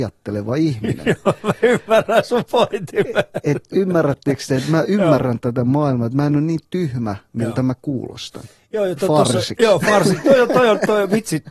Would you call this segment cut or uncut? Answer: uncut